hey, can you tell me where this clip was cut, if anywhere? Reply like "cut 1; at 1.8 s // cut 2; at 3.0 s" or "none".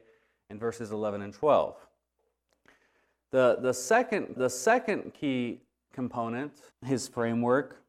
cut 1; at 4.4 s // cut 2; at 6.7 s